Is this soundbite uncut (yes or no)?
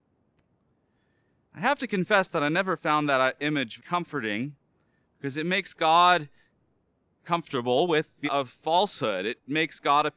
no